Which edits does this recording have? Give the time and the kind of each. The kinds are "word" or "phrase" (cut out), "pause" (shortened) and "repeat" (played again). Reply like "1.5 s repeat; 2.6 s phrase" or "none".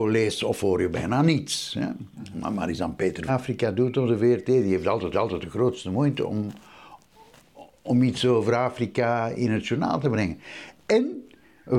3.3 s phrase; 5.1 s repeat